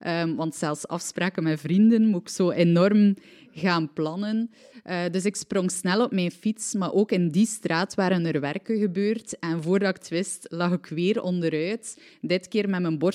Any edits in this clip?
no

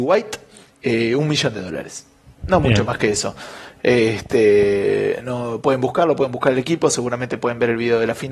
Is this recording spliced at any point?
no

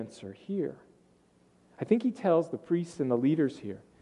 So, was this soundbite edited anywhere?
no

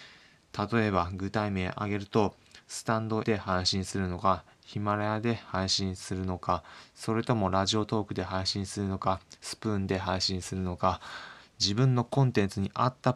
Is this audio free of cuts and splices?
no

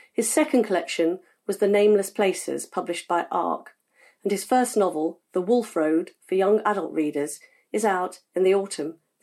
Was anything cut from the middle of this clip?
no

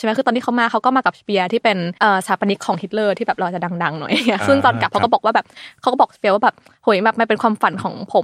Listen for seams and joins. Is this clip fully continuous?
no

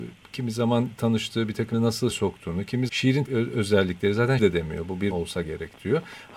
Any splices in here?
yes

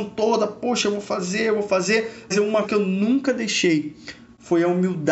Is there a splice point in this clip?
yes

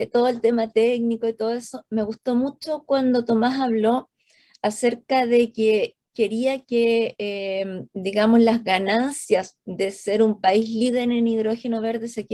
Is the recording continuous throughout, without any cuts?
yes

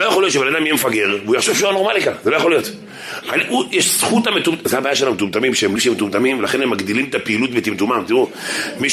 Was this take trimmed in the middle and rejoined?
yes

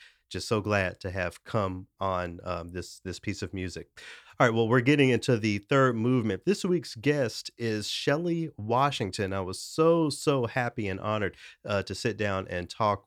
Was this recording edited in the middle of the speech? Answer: no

